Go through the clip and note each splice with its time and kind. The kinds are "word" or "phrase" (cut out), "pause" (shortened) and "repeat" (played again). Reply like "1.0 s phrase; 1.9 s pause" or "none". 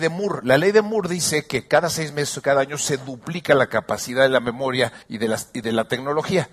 5.0 s pause